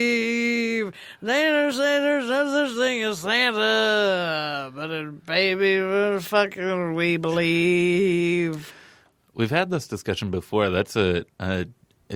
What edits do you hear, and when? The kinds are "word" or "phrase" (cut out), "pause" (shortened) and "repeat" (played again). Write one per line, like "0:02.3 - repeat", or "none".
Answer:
none